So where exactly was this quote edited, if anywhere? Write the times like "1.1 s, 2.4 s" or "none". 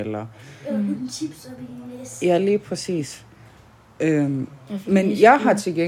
none